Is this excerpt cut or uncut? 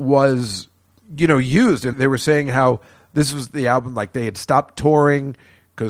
cut